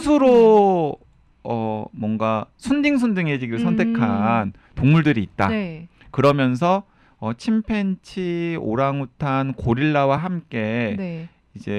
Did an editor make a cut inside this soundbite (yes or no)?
no